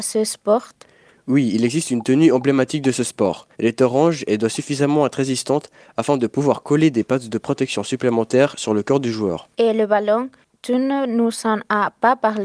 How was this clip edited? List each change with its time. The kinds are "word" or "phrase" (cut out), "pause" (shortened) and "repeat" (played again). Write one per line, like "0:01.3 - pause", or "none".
0:03.5 - pause
0:09.5 - pause